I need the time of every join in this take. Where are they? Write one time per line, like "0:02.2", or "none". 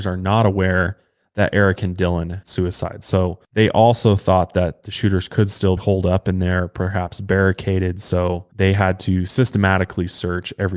0:02.4
0:03.4
0:05.8
0:08.5